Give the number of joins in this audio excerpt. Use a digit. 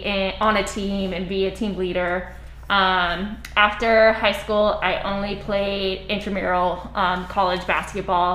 0